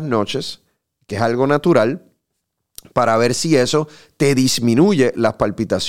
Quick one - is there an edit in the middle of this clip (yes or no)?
no